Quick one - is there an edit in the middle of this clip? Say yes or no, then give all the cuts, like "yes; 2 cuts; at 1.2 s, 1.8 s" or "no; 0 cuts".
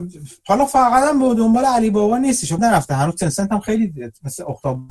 yes; 1 cut; at 2.6 s